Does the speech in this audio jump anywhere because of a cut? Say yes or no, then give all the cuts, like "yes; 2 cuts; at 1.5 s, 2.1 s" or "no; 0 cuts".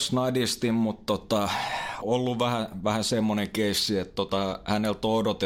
yes; 1 cut; at 2.0 s